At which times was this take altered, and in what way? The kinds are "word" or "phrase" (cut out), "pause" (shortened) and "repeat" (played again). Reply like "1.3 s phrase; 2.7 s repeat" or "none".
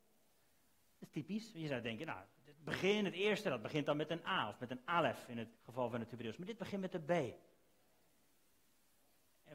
5.6 s pause